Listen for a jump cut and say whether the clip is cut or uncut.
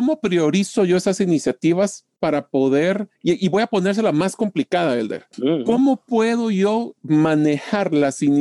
cut